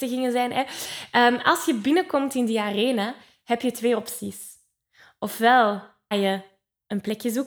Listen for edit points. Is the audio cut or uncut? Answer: cut